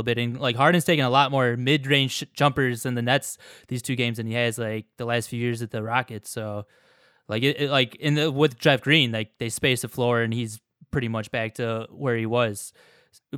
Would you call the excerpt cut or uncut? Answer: uncut